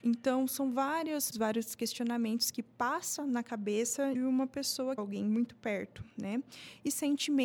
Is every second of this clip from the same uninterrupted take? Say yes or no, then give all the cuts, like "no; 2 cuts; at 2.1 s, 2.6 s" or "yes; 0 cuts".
no; 3 cuts; at 1.3 s, 4.1 s, 5.0 s